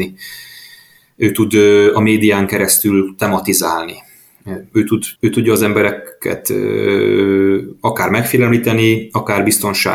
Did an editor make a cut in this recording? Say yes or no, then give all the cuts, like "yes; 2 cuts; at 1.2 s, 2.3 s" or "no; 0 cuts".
yes; 1 cut; at 5.2 s